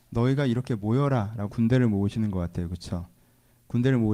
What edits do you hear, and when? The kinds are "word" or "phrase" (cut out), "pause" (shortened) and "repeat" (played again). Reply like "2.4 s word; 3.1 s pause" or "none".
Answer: 1.5 s word